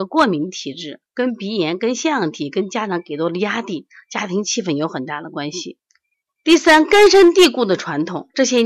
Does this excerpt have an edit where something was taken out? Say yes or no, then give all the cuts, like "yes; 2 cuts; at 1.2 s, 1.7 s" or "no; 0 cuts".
yes; 2 cuts; at 1.1 s, 6.1 s